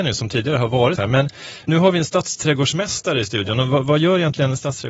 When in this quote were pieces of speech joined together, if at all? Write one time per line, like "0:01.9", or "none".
0:01.0
0:01.7

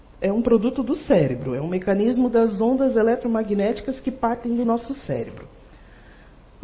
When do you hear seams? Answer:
none

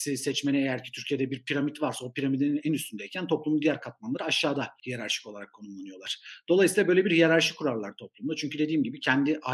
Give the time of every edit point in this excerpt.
none

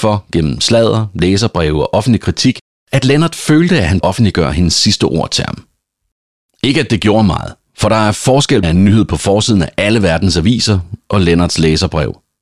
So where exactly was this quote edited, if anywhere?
0:04.0
0:08.6

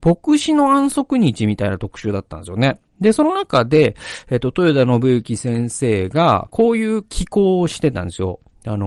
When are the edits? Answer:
none

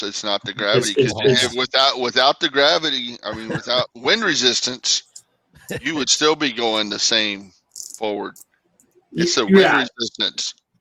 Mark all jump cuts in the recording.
none

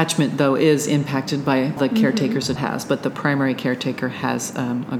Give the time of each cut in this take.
0:01.8
0:02.6

